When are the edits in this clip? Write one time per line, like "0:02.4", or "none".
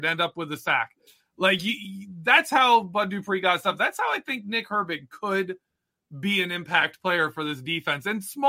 none